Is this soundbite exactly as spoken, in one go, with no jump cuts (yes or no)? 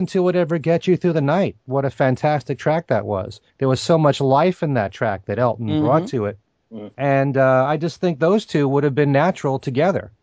no